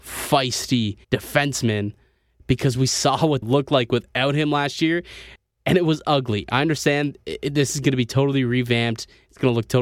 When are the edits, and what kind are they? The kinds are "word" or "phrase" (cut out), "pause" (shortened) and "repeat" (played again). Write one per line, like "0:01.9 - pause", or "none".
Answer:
0:01.0 - pause
0:03.4 - phrase
0:05.4 - pause

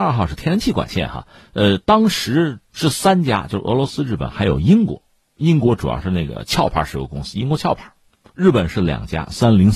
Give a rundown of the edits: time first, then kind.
none

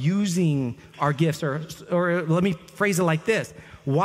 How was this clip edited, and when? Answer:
none

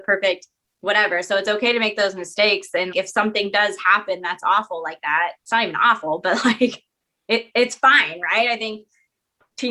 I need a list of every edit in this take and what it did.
0:02.9 - word
0:05.4 - word

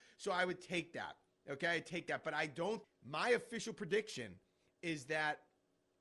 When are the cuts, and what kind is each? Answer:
0:02.8 - word

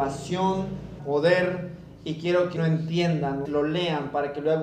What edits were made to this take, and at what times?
0:01.0 - word
0:02.6 - word
0:03.5 - word

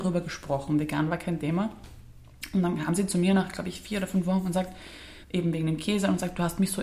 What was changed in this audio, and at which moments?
0:05.2 - pause

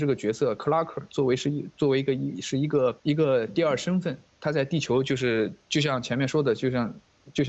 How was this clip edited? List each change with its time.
0:03.0 - pause

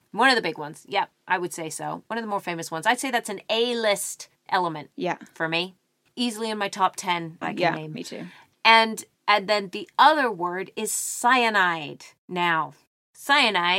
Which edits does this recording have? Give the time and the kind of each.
0:07.4 - phrase
0:09.1 - pause

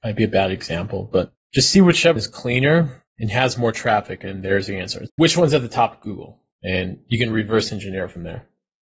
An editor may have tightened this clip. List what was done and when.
0:02.2 - word
0:05.1 - word
0:06.5 - pause

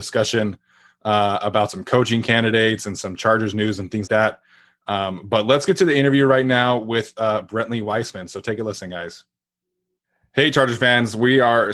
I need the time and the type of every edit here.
0:04.1 - word

